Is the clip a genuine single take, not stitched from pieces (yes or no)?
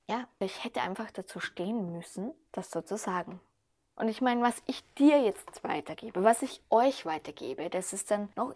yes